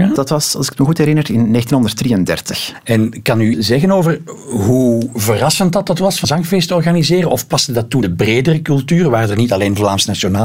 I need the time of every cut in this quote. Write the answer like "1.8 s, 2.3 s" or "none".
3.5 s, 6.2 s, 8.0 s